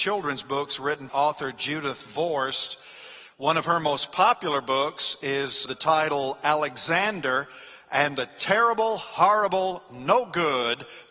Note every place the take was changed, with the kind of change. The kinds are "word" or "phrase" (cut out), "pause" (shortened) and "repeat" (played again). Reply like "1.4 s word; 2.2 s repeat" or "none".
1.1 s phrase; 5.7 s word